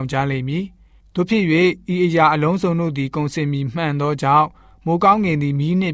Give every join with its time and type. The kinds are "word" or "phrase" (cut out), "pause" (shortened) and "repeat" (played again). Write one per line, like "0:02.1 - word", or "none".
none